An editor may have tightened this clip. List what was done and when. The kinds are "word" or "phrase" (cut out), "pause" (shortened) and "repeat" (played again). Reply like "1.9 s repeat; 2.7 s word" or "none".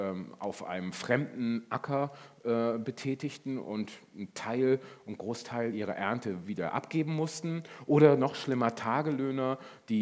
none